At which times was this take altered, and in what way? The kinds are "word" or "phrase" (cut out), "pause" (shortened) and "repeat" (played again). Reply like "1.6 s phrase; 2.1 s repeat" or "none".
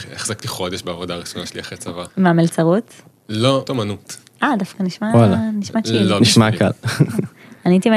2.1 s pause; 3.7 s word